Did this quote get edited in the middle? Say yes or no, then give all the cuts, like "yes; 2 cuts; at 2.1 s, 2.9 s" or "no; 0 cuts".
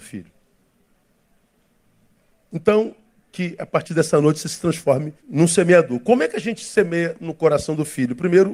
yes; 1 cut; at 5.2 s